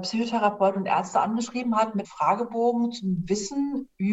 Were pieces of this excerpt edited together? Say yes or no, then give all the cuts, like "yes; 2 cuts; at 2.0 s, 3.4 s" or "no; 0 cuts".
yes; 1 cut; at 2.0 s